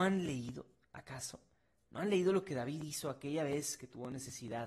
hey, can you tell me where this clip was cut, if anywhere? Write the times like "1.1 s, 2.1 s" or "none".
none